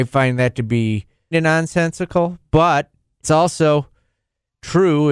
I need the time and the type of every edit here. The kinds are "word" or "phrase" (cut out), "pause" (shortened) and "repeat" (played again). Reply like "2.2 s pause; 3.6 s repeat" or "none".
1.3 s word; 3.2 s word